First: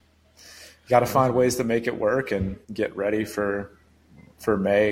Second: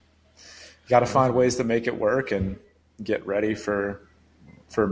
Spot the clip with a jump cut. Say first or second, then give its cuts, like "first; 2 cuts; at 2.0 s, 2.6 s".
first; 1 cut; at 2.6 s